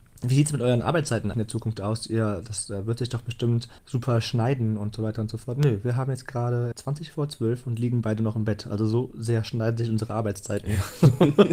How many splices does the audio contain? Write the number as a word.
three